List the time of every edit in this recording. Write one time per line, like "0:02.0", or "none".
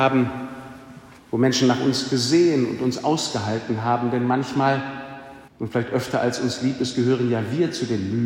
0:01.2
0:05.5